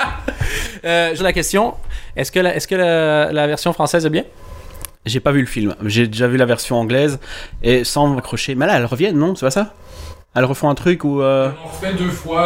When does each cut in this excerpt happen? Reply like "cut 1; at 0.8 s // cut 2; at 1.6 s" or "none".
cut 1; at 1.2 s // cut 2; at 8.2 s